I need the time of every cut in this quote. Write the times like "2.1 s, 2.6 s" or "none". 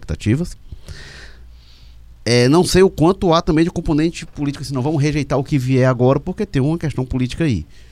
none